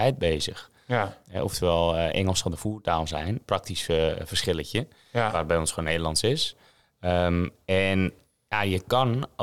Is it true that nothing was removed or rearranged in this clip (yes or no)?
yes